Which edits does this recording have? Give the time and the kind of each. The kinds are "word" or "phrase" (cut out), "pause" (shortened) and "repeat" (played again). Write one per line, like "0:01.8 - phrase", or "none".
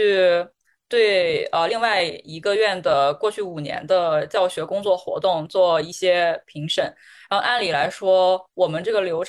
none

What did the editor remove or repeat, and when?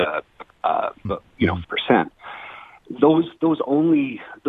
0:01.0 - phrase
0:01.6 - word

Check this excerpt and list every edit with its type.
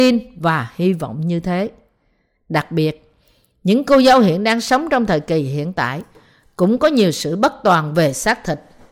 none

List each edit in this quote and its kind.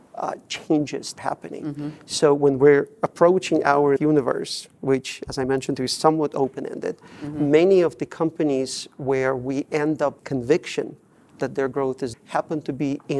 0:01.2 - word
0:04.0 - word
0:10.2 - word
0:12.1 - word

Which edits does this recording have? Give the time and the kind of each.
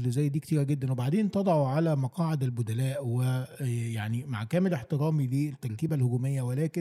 none

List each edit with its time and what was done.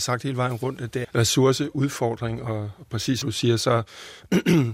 0:01.0 - word
0:03.2 - word

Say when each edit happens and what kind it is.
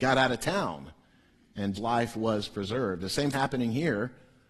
0:01.7 - word
0:03.3 - word

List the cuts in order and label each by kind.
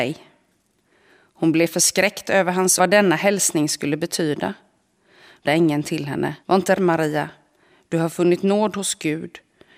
0:02.8 - phrase
0:05.4 - word
0:06.4 - pause
0:06.8 - word

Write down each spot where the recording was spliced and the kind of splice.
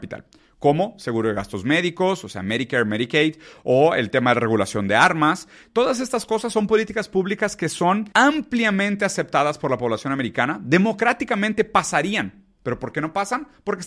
0:08.1 - pause

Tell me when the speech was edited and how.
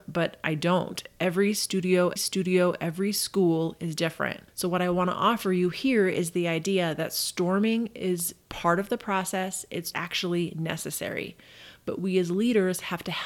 0:02.2 - repeat
0:04.5 - pause
0:08.4 - pause
0:09.9 - phrase

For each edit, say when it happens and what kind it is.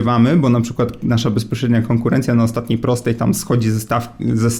none

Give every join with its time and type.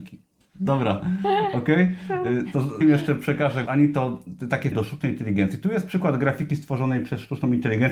0:02.8 - word
0:03.7 - word
0:04.7 - word

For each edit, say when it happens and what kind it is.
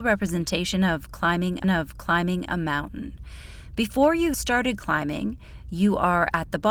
0:01.6 - repeat
0:04.3 - word

